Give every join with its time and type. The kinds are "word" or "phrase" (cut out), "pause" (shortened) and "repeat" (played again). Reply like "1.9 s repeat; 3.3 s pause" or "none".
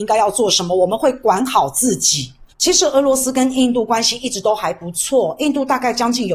2.5 s pause